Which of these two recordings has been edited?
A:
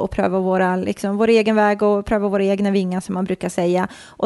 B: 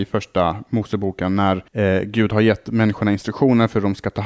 B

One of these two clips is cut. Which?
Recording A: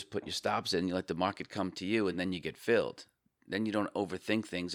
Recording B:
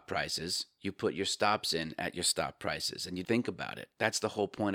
B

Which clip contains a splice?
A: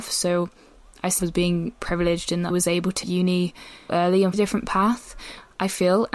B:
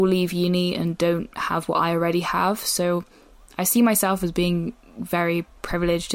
A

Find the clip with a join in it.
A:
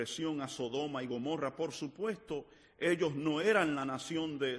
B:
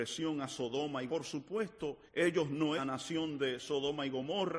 B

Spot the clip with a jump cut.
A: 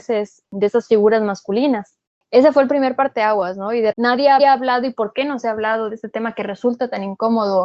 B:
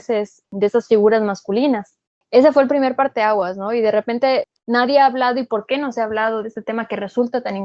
A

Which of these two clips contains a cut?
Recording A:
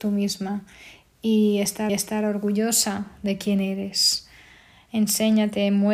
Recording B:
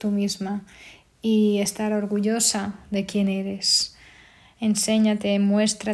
A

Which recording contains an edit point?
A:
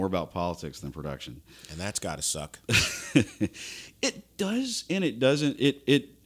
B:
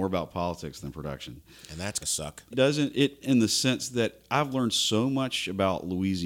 B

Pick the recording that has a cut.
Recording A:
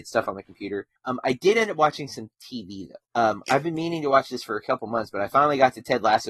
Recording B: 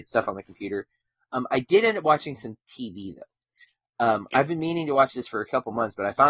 A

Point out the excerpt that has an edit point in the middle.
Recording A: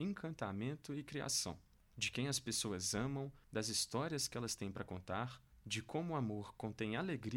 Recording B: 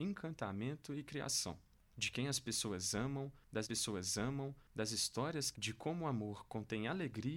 B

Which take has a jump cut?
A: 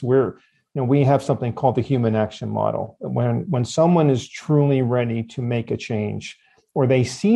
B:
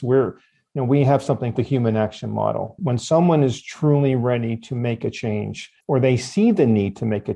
B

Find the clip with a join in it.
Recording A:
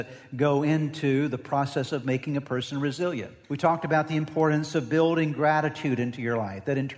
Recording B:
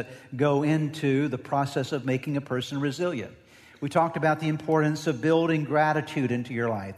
A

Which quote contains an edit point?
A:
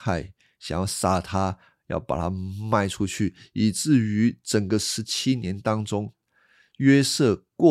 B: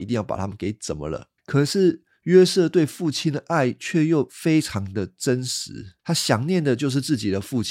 B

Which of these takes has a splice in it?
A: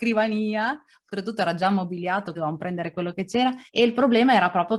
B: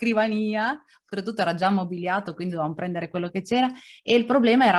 A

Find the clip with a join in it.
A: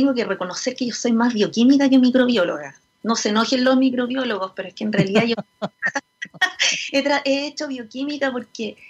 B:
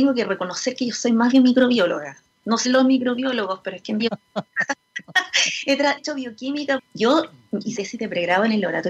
B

